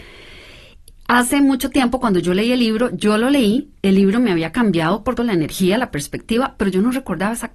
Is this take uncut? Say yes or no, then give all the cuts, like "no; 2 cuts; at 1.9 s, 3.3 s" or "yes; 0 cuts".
no; 1 cut; at 5.2 s